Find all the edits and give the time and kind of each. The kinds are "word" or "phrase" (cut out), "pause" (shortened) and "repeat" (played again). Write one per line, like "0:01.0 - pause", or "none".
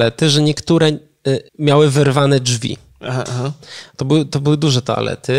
0:01.5 - pause